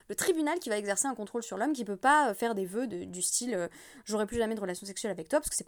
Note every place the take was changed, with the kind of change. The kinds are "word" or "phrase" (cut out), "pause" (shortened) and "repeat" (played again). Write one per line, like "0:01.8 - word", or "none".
none